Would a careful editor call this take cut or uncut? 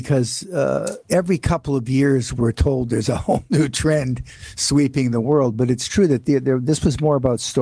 cut